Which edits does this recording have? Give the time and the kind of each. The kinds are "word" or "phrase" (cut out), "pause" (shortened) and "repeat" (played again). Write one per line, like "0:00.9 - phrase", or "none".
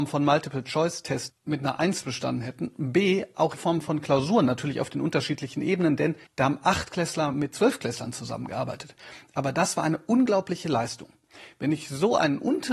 0:01.3 - word
0:03.6 - word
0:06.3 - pause